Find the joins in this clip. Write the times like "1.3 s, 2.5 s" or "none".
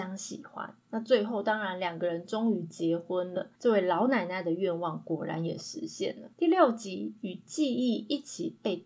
3.6 s, 6.3 s